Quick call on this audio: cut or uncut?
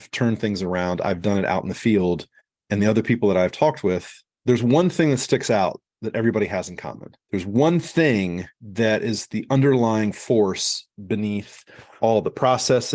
cut